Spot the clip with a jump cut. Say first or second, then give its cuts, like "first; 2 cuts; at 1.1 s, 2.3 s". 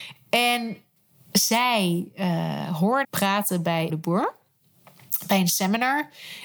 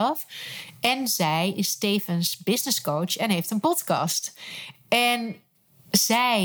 first; 2 cuts; at 3.0 s, 3.9 s